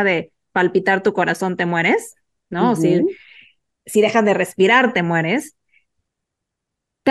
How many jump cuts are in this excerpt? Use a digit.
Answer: 0